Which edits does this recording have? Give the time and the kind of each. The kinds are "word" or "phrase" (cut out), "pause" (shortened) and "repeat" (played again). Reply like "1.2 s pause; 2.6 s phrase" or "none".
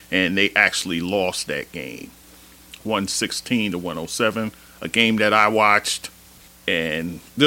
none